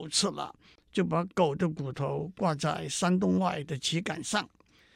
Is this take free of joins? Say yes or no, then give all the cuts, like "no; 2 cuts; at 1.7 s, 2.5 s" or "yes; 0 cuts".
yes; 0 cuts